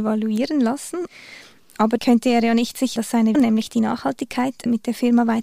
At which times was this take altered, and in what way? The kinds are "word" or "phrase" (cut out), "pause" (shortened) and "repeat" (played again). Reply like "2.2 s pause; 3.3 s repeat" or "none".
2.0 s word; 3.0 s word; 3.3 s word